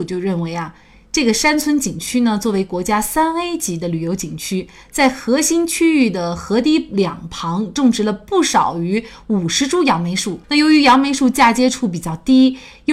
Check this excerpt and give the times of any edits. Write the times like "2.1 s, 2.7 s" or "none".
10.4 s